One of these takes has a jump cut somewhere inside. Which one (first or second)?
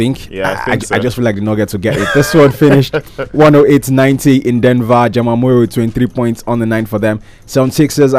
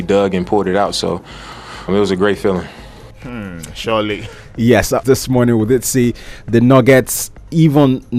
second